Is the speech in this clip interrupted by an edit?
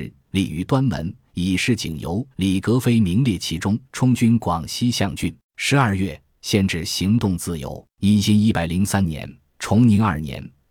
yes; 4 cuts; at 2.3 s, 3.8 s, 5.4 s, 7.9 s

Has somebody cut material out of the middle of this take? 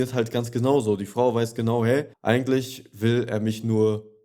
yes; 1 cut; at 2.1 s

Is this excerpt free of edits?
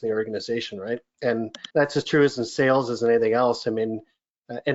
no; 1 cut; at 1.7 s

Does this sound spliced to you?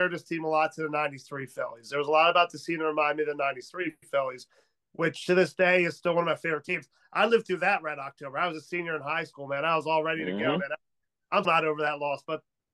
yes; 1 cut; at 11.4 s

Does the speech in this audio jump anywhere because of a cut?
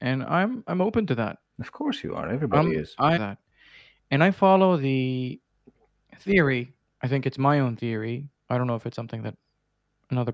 yes; 3 cuts; at 1.4 s, 3.2 s, 6.9 s

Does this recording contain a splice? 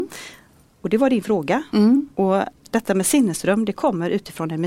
no; 0 cuts

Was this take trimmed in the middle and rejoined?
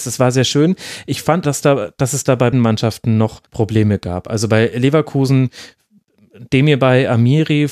yes; 3 cuts; at 1.4 s, 2.5 s, 3.5 s

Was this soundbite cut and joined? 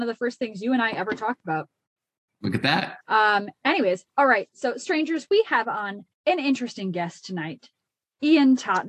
yes; 3 cuts; at 3.0 s, 4.1 s, 6.1 s

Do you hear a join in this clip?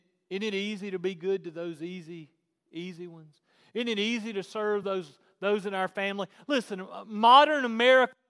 no; 0 cuts

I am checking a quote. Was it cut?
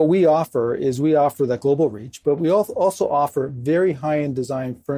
no; 0 cuts

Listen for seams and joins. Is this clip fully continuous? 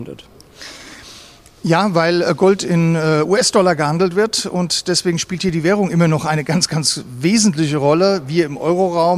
yes; 0 cuts

